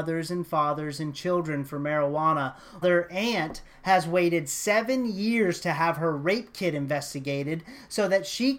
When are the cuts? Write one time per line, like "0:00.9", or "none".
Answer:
0:02.8